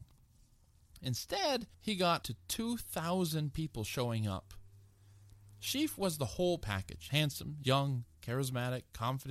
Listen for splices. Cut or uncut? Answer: cut